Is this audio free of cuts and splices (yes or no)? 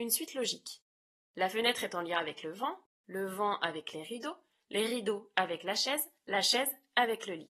yes